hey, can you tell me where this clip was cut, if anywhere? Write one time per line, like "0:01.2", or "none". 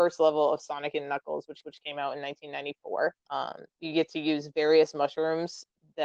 0:01.6
0:03.2